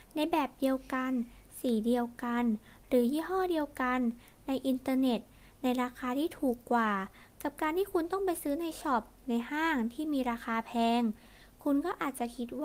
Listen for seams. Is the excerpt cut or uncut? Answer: uncut